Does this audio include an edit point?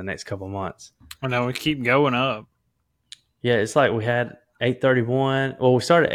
no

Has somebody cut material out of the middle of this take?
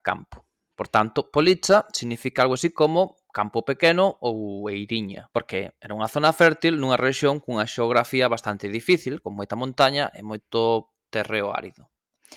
yes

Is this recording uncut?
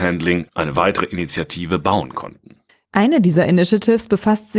no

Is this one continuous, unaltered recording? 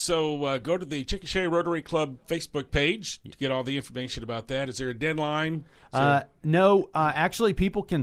yes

